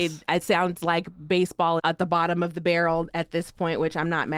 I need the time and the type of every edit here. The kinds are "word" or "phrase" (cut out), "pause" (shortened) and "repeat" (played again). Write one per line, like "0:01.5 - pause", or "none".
0:01.8 - word